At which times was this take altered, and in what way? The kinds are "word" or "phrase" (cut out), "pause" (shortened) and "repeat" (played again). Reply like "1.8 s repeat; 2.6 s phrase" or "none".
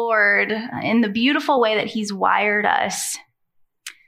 none